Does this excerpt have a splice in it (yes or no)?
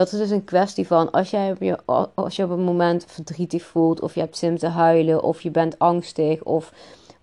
no